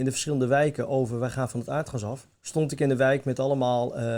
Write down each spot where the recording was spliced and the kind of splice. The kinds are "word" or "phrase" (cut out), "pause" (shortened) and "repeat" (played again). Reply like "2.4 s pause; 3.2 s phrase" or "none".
2.3 s pause